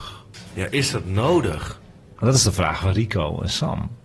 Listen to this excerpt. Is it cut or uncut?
uncut